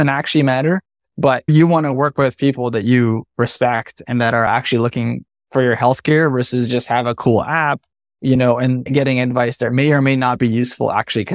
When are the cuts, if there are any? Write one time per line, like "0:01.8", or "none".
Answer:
none